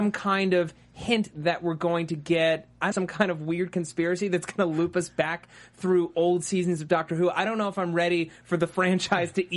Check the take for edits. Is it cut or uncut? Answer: cut